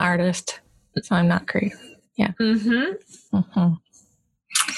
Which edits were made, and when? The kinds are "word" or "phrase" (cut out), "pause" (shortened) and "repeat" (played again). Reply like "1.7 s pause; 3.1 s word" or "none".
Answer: none